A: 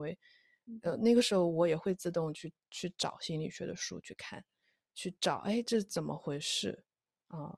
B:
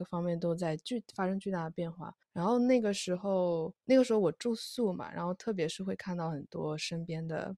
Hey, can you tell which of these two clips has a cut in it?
B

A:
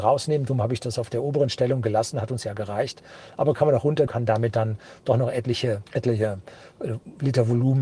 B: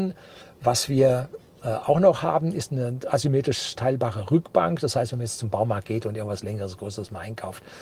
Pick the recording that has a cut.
A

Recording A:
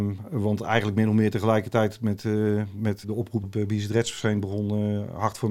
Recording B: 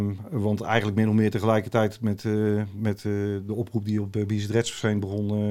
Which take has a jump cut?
A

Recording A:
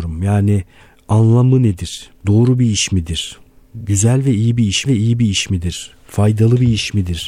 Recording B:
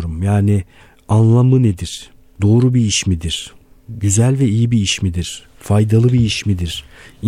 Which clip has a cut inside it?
A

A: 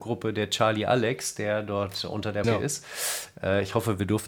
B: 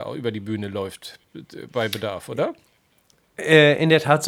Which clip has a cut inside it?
A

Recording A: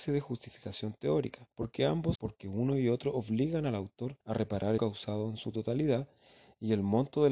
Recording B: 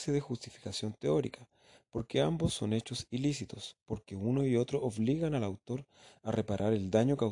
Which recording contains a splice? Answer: A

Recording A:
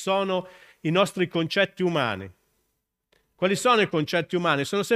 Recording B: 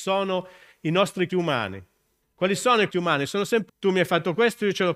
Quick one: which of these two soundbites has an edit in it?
B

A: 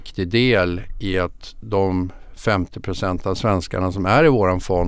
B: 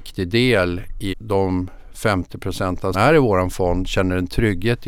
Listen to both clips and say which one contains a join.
B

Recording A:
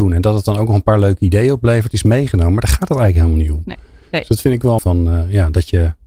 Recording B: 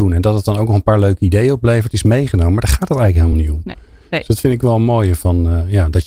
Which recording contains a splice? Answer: A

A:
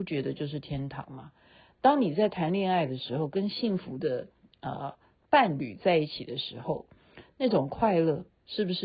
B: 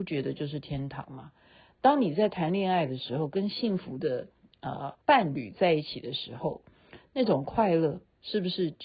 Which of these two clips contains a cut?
B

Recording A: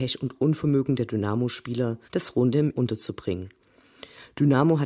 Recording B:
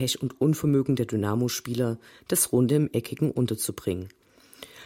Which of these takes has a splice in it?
A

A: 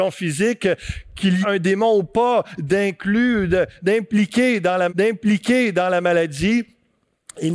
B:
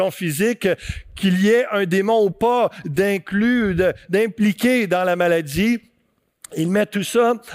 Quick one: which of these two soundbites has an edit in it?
A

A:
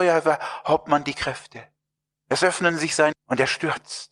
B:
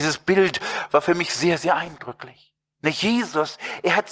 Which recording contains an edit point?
A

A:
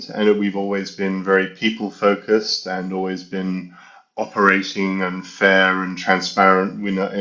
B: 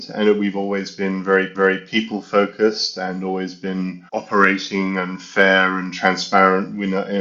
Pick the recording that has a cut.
B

